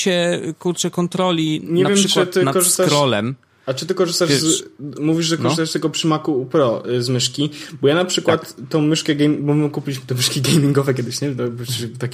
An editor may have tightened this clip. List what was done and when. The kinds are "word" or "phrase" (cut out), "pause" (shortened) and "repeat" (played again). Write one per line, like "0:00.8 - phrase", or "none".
none